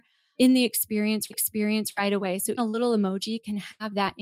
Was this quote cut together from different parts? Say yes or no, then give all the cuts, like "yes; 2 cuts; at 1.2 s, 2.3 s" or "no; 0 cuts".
yes; 2 cuts; at 1.3 s, 2.6 s